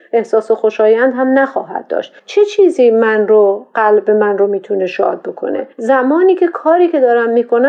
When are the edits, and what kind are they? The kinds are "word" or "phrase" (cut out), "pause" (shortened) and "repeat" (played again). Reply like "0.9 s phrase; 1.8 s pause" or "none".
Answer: 5.7 s pause